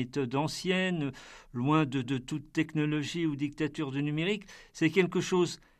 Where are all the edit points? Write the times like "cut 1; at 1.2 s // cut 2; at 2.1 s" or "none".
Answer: cut 1; at 2.0 s